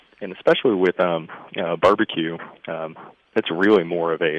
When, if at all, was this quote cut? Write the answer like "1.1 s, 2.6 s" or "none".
none